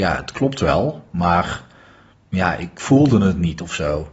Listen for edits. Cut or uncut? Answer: uncut